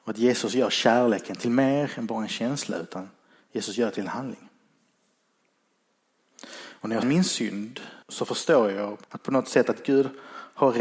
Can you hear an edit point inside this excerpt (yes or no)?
yes